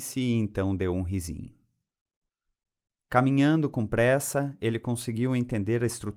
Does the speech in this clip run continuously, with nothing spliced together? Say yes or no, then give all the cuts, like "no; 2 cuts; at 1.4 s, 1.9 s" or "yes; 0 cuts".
yes; 0 cuts